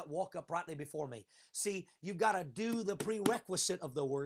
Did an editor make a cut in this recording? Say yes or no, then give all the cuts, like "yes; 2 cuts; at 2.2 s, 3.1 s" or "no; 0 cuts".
no; 0 cuts